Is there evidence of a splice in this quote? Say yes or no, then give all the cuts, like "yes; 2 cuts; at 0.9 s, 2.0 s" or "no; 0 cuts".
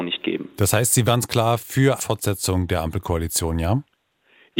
yes; 2 cuts; at 1.1 s, 2.0 s